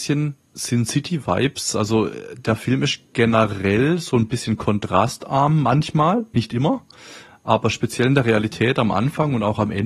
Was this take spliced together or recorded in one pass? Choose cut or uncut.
uncut